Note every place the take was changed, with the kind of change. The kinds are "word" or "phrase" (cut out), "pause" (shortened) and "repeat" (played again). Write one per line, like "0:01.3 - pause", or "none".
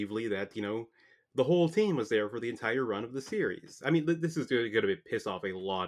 none

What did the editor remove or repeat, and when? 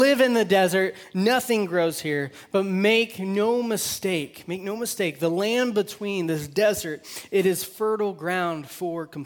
none

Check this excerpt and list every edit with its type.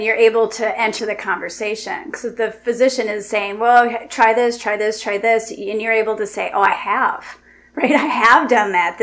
0:01.0 - word

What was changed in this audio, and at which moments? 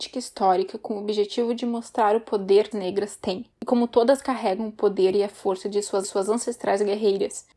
0:02.7 - phrase
0:03.5 - pause
0:06.0 - repeat

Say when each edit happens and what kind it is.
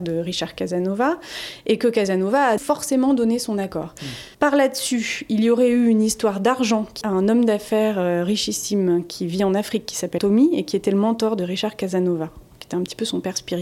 0:02.6 - word
0:04.3 - pause
0:07.0 - phrase
0:10.2 - word

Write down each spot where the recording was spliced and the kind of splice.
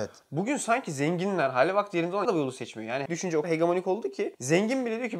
0:02.2 - word
0:03.1 - word
0:03.4 - word

